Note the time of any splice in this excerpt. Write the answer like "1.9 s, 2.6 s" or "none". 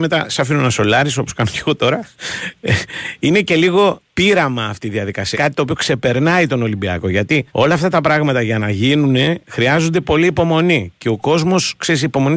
4.1 s, 5.3 s, 7.5 s

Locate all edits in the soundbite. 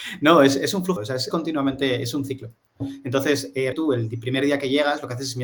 1.0 s, 1.3 s, 3.7 s

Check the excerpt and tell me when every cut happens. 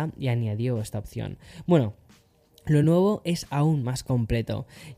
none

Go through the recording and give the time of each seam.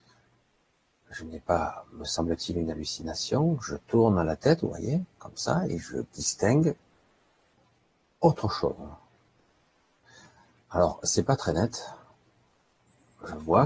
none

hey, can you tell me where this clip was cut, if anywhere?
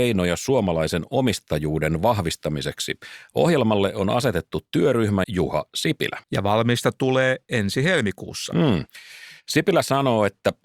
5.2 s, 6.2 s

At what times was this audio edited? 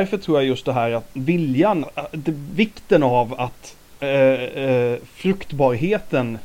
1.8 s, 4.0 s

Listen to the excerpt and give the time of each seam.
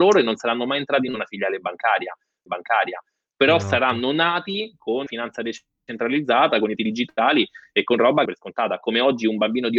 1.1 s, 2.5 s, 5.1 s, 6.8 s, 8.3 s

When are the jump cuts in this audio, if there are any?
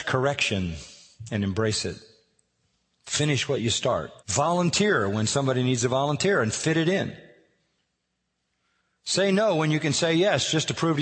4.2 s

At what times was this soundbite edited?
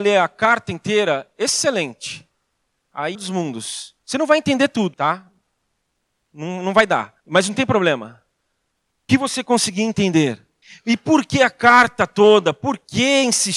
3.1 s, 4.0 s, 4.9 s, 7.2 s, 9.1 s, 10.6 s

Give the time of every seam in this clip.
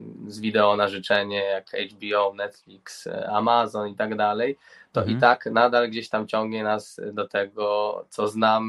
none

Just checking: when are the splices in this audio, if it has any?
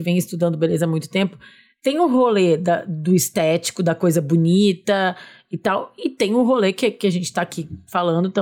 none

